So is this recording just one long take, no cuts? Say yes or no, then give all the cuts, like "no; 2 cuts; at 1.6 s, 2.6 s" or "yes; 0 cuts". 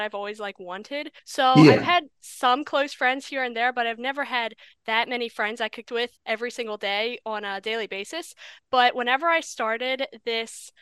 no; 3 cuts; at 1.2 s, 5.8 s, 6.2 s